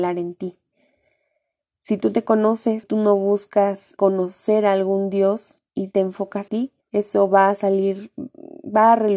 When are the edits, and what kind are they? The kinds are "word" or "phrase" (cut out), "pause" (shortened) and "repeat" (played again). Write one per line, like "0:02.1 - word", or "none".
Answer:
0:02.8 - word
0:04.0 - word
0:05.7 - pause
0:06.5 - word
0:06.8 - pause